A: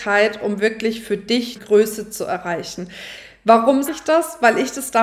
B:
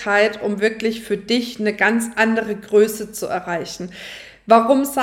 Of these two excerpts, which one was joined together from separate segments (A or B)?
A